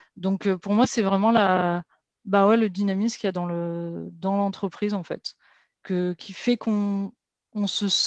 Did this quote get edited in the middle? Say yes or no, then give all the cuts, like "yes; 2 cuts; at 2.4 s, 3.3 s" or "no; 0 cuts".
no; 0 cuts